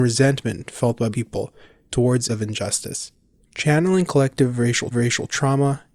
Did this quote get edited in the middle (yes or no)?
yes